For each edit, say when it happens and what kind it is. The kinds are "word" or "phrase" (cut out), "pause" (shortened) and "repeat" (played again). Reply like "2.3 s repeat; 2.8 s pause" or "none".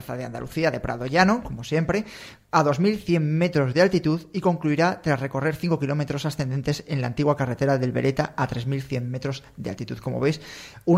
none